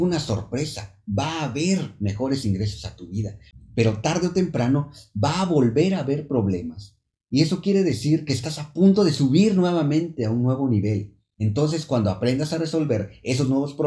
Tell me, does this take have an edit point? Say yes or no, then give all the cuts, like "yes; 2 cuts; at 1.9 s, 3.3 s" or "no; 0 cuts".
no; 0 cuts